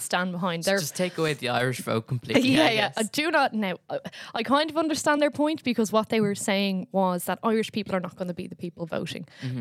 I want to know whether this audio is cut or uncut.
uncut